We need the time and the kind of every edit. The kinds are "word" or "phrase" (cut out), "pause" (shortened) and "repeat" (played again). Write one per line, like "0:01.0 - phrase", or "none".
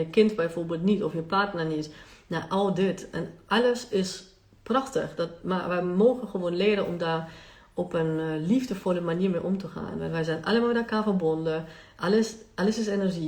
none